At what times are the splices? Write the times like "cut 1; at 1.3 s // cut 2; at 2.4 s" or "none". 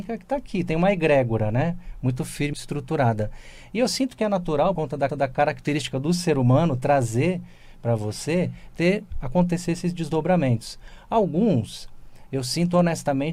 cut 1; at 2.5 s // cut 2; at 4.8 s // cut 3; at 5.1 s